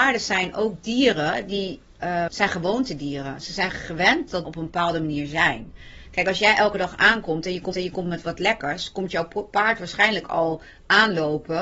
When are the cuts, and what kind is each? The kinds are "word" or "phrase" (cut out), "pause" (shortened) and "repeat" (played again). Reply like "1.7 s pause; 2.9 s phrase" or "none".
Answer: 2.3 s word; 4.4 s word; 7.7 s repeat